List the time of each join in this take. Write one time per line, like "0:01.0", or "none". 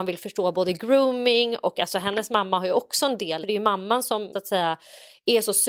0:03.4
0:04.3

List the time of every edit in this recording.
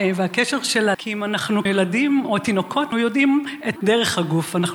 0:00.9
0:01.7
0:02.9
0:03.8

